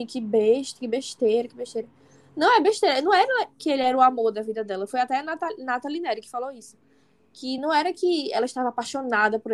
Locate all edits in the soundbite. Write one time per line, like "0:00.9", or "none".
none